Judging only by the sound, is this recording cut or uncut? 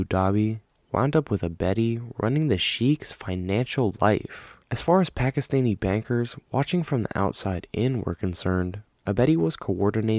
cut